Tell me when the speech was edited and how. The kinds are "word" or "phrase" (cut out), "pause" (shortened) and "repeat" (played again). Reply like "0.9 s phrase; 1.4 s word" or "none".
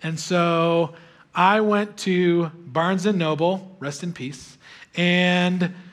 none